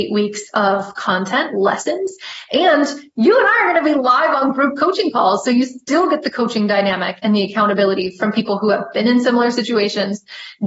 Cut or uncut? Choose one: uncut